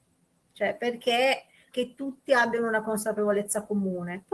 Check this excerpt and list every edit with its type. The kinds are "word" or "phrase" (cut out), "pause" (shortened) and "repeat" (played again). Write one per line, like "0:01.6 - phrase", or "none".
0:01.7 - word